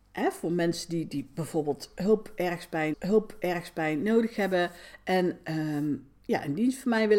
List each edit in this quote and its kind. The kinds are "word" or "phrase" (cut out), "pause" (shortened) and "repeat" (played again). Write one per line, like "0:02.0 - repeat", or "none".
0:02.9 - repeat